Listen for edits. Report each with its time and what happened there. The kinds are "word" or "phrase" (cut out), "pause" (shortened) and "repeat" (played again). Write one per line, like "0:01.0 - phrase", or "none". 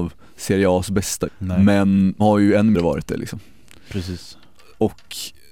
0:01.3 - word
0:02.2 - word
0:02.7 - word